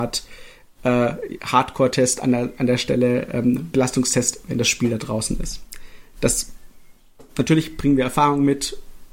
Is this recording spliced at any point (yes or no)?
yes